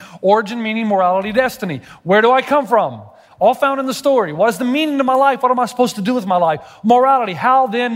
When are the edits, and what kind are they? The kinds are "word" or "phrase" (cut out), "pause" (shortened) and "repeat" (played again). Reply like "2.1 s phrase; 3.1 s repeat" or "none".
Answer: none

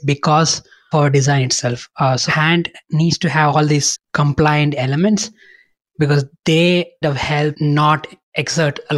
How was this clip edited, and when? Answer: 0.9 s word; 2.3 s word; 3.9 s word; 7.0 s word

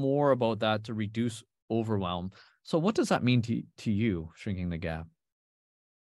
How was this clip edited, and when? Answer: none

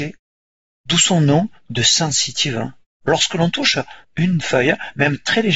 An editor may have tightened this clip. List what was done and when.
2.9 s pause; 4.0 s pause; 4.4 s word

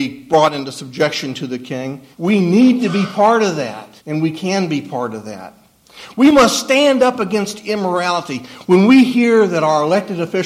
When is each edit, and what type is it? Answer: 2.1 s pause; 4.0 s pause

